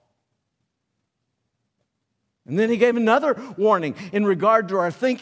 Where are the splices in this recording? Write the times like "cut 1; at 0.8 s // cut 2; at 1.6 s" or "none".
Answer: none